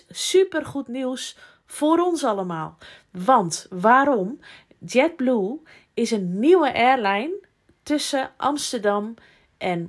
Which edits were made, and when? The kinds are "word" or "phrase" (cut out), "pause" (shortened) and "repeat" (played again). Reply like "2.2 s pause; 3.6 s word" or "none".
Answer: none